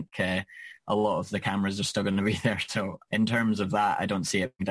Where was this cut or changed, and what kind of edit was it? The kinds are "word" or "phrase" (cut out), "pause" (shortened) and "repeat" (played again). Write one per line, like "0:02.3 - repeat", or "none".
0:03.1 - word